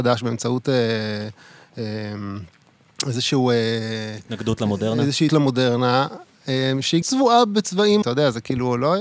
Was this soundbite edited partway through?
yes; 3 cuts; at 5.3 s, 7.0 s, 8.0 s

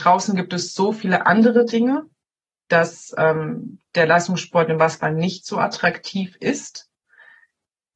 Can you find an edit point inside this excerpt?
no; 0 cuts

